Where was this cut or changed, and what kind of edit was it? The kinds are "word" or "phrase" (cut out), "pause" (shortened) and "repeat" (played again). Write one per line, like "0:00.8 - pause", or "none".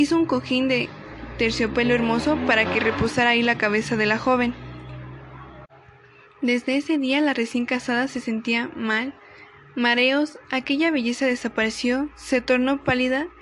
none